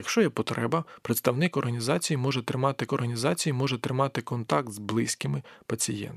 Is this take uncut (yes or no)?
no